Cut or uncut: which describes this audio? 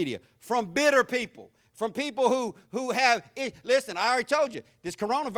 uncut